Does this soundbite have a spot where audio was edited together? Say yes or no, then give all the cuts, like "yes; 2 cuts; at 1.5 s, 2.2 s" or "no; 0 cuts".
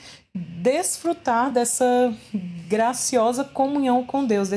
no; 0 cuts